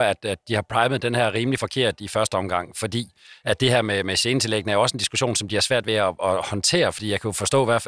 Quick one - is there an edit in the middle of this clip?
no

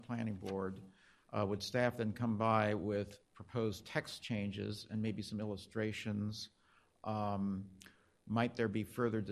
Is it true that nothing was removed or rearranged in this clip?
yes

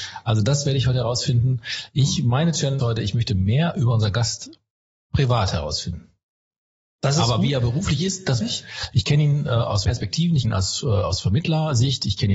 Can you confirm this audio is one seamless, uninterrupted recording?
no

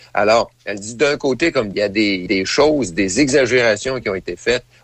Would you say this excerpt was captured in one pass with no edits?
no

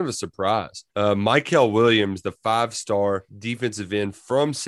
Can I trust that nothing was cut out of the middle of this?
no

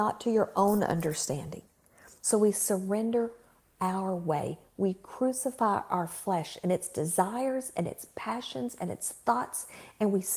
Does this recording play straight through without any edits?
yes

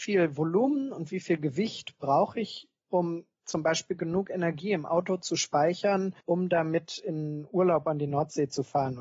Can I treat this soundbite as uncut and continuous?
no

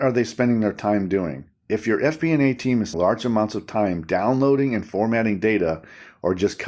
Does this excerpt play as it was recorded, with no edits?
no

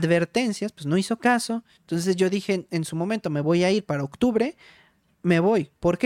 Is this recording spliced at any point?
no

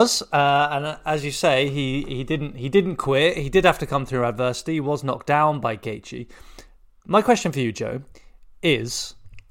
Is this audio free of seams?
yes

